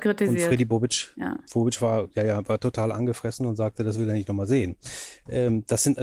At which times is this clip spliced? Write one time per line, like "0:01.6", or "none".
none